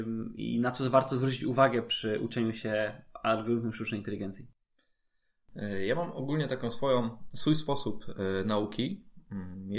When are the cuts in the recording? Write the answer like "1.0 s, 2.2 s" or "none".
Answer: none